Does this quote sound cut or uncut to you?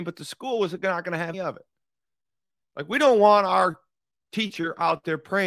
cut